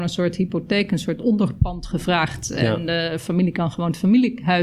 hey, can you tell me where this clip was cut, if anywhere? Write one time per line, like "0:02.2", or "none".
none